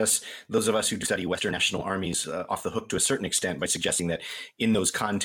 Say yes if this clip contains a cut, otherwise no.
no